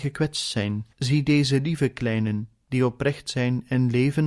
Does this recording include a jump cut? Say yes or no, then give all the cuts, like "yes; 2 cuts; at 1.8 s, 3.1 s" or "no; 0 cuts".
yes; 1 cut; at 0.9 s